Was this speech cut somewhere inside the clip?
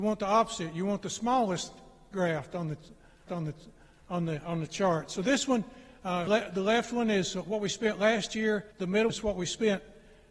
yes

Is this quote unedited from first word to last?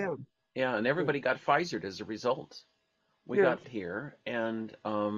no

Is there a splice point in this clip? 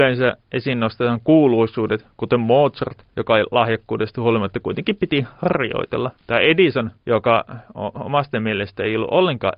yes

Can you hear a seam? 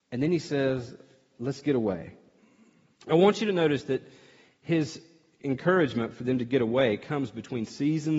no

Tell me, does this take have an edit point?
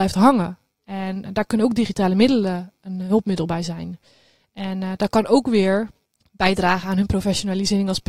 yes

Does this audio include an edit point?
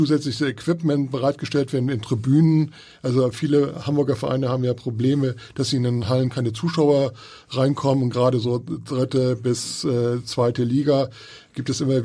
no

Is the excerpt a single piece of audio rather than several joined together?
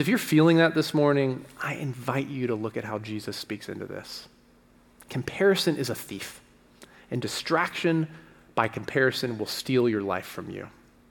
yes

